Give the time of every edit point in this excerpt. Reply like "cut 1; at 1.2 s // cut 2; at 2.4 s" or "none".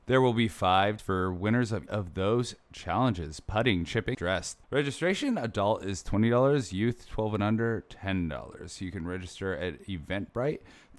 cut 1; at 1.0 s // cut 2; at 1.9 s // cut 3; at 4.1 s // cut 4; at 4.6 s